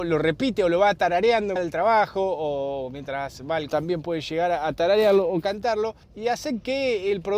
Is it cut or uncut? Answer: cut